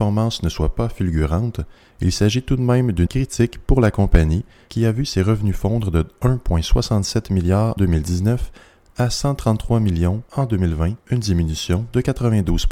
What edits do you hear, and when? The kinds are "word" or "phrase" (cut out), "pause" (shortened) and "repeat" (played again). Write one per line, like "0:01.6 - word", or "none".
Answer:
0:03.1 - word
0:07.8 - word
0:10.3 - pause
0:11.0 - pause